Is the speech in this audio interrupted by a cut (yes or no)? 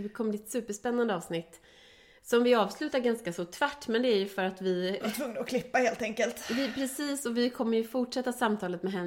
no